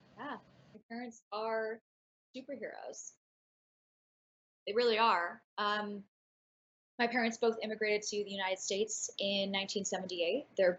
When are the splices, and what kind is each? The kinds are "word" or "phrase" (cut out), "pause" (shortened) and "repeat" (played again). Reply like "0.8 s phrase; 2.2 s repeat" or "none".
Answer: none